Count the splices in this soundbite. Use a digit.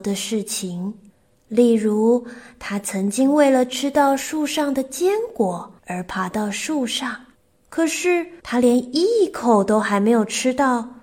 4